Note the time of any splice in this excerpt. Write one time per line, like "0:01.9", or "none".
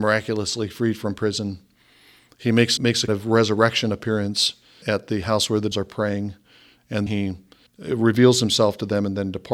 0:02.8
0:03.1
0:04.8
0:05.7
0:07.1
0:07.7